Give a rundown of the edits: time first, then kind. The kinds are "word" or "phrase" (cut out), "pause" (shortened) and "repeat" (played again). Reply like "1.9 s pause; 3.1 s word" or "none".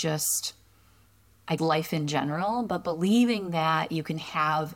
1.6 s word